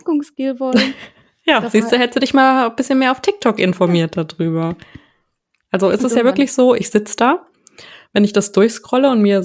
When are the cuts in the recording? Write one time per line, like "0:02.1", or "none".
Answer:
none